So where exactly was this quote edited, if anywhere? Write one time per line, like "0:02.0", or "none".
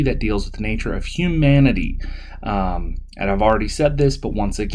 none